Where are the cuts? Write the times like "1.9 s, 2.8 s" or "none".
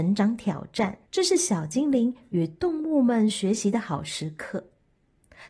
1.1 s